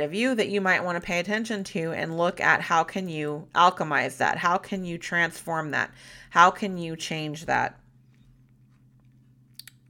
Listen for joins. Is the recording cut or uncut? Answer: uncut